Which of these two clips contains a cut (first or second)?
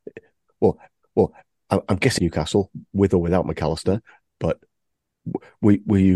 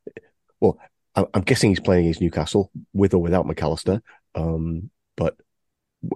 first